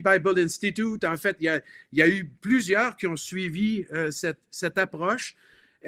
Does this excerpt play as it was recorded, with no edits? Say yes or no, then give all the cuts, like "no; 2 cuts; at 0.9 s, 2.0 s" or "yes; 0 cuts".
yes; 0 cuts